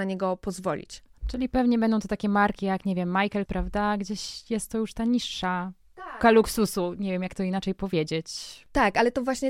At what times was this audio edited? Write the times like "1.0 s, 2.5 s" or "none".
3.5 s, 6.2 s